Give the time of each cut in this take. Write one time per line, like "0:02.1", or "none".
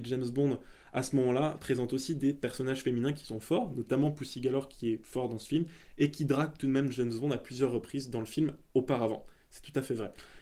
none